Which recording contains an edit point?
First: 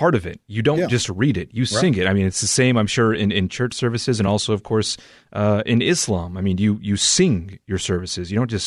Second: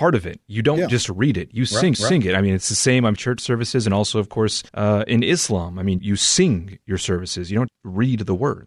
second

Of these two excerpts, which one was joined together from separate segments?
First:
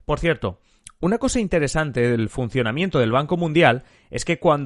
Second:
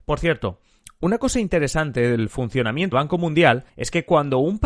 second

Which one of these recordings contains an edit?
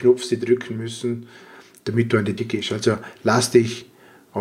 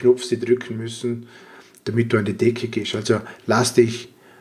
first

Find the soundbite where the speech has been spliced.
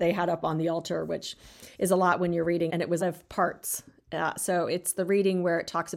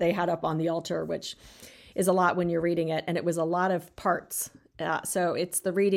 first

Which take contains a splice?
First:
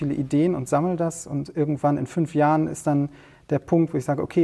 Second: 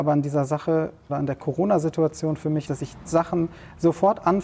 second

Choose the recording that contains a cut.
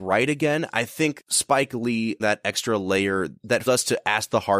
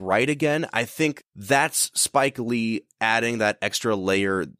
first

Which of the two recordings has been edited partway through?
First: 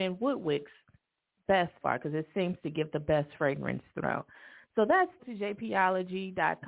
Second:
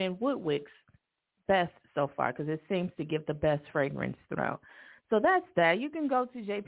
first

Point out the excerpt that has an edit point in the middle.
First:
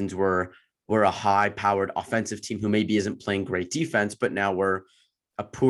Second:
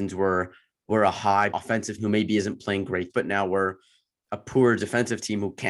second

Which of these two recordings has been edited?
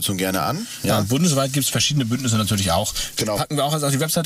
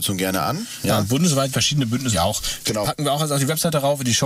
second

